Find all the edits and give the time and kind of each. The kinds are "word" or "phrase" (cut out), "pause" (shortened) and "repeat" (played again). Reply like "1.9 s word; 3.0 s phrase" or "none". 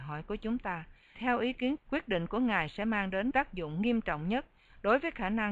1.1 s word; 1.8 s word; 3.3 s word